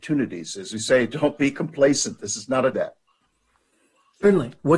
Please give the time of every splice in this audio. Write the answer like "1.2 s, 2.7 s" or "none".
2.7 s